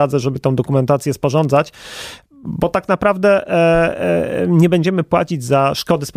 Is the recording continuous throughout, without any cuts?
yes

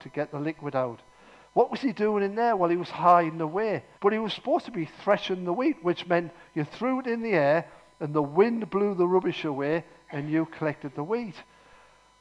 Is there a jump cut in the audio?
yes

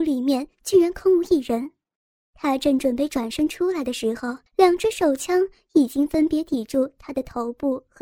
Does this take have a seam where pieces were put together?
yes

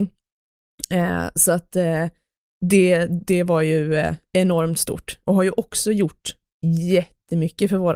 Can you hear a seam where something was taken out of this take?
no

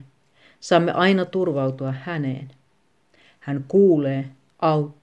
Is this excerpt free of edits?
yes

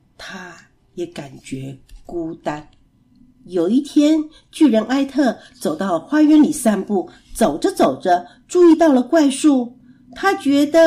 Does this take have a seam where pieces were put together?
yes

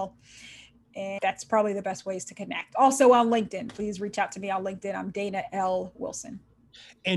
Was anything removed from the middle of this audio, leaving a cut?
no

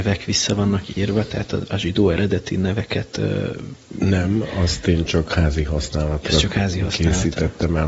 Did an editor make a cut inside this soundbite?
no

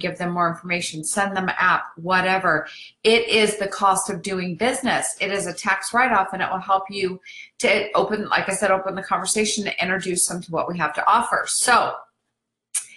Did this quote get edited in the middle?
no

